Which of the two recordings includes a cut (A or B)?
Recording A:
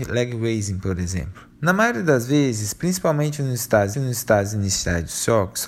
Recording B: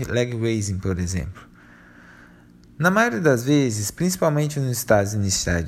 A